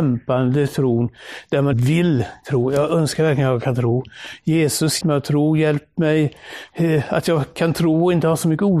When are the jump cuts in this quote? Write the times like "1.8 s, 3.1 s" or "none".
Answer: 1.7 s, 5.0 s